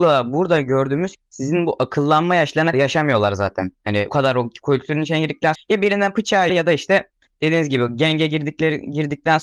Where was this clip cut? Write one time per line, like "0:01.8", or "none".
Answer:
0:01.1
0:02.7
0:04.1
0:05.6
0:06.5